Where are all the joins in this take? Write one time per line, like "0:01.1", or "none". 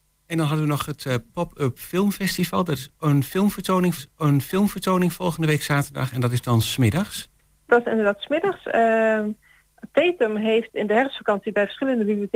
0:04.0